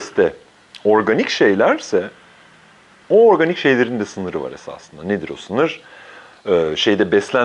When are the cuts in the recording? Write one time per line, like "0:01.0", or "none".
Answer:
none